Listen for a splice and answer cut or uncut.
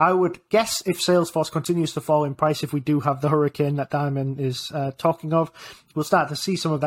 uncut